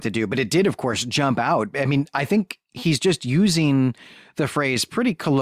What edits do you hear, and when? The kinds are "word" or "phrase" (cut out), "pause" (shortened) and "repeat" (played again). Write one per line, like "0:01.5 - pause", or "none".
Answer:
none